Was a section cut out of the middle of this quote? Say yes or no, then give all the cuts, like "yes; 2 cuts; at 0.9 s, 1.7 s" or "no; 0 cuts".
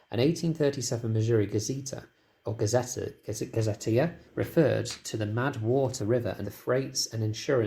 yes; 4 cuts; at 2.4 s, 4.3 s, 6.0 s, 6.4 s